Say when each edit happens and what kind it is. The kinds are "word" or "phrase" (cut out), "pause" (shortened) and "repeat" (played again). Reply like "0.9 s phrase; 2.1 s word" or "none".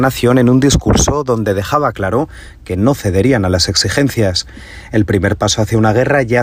none